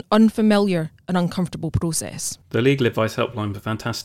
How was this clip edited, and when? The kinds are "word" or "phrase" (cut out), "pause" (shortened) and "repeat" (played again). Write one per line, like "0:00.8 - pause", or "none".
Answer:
0:02.4 - pause